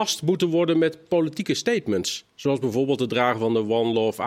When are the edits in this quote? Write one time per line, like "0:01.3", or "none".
none